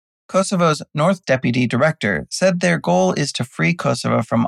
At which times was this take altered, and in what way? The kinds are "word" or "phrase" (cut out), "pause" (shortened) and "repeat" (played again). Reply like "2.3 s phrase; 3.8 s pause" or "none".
1.2 s word